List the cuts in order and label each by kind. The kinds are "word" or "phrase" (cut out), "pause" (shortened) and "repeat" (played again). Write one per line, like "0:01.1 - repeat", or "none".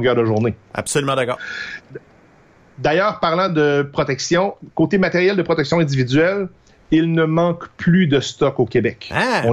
none